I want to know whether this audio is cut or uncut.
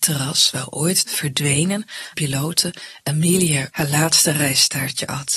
cut